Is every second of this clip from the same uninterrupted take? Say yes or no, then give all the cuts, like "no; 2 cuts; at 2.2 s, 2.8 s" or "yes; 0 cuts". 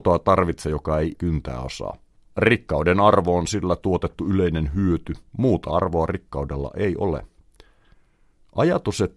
no; 3 cuts; at 1.1 s, 2.2 s, 5.3 s